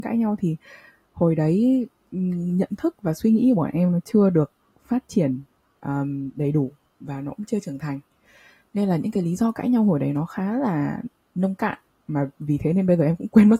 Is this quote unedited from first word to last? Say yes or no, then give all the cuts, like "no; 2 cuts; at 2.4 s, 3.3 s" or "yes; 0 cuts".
yes; 0 cuts